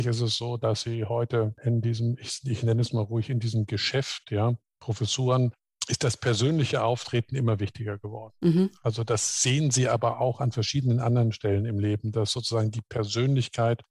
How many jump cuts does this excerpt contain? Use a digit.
0